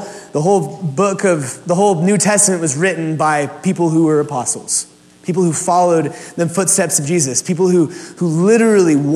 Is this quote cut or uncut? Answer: uncut